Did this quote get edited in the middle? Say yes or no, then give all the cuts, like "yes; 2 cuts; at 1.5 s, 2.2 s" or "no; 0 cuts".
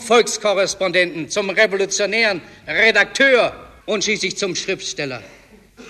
yes; 1 cut; at 3.8 s